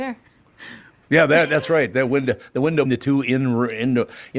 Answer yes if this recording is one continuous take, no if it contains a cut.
no